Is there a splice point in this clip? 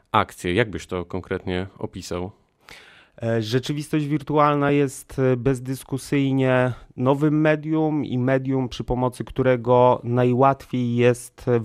no; 0 cuts

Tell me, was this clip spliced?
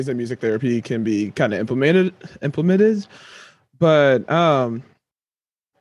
no; 0 cuts

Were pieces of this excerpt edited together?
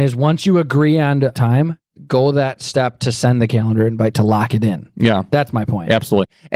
no; 0 cuts

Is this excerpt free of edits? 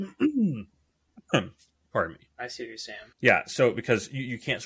no; 2 cuts; at 1.8 s, 3.1 s

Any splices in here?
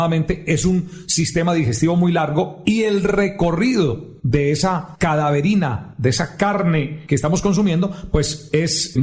no; 0 cuts

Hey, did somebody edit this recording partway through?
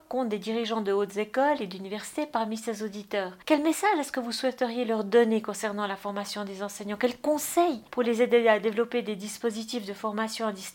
yes; 2 cuts; at 3.4 s, 7.9 s

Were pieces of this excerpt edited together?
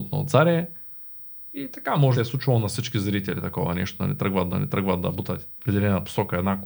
yes; 3 cuts; at 2.1 s, 4.5 s, 5.6 s

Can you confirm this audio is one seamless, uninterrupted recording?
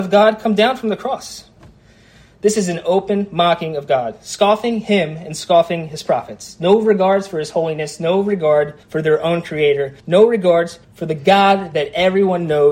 no; 3 cuts; at 8.8 s, 10.0 s, 10.8 s

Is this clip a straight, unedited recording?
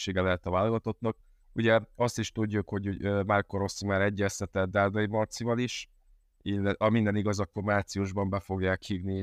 yes; 0 cuts

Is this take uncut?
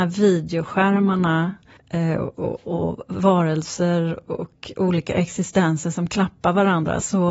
no; 2 cuts; at 1.8 s, 2.6 s

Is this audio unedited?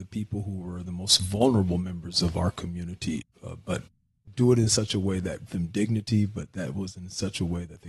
no; 1 cut; at 5.5 s

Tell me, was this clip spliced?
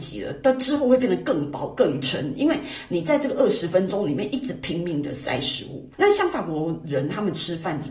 yes; 1 cut; at 5.9 s

